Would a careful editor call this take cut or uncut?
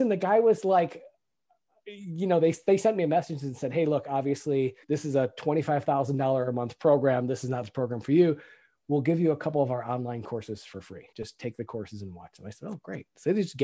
cut